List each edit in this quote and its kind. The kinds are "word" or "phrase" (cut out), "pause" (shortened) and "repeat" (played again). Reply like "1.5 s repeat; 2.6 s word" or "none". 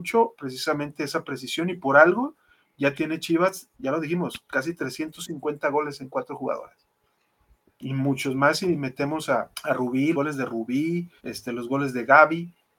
3.7 s pause; 9.5 s pause; 10.1 s word; 11.2 s pause